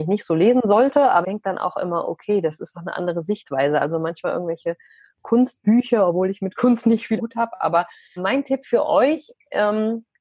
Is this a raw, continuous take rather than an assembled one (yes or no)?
no